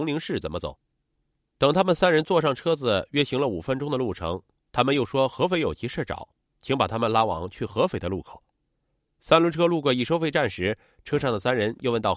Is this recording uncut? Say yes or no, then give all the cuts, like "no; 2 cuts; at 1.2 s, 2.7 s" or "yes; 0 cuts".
yes; 0 cuts